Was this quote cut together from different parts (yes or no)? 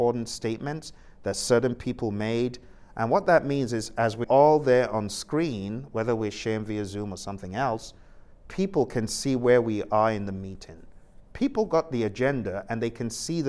yes